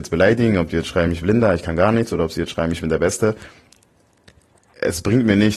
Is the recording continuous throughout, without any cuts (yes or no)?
no